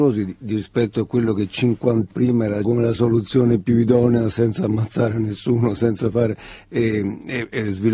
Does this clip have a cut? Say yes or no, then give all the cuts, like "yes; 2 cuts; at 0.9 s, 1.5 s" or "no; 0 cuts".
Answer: yes; 2 cuts; at 2.1 s, 2.6 s